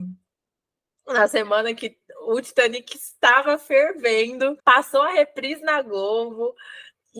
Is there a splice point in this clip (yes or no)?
yes